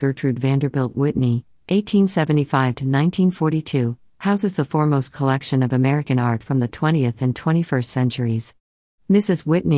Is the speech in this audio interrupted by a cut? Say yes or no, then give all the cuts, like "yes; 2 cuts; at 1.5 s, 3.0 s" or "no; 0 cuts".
no; 0 cuts